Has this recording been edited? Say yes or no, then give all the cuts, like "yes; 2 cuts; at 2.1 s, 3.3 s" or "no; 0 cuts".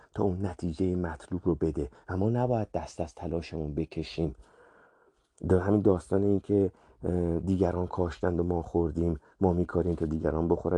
no; 0 cuts